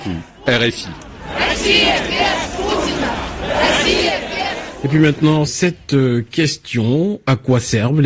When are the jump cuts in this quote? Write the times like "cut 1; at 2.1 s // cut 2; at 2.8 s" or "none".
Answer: cut 1; at 5.5 s